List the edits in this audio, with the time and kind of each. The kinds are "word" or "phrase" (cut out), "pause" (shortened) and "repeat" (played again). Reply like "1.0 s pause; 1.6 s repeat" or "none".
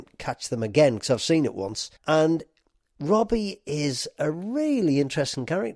2.0 s pause